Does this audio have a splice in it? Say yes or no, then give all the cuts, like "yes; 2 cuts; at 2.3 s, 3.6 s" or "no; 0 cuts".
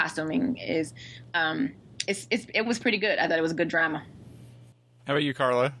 no; 0 cuts